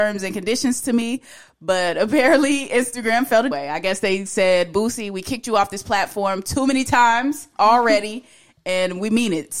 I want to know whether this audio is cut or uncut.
cut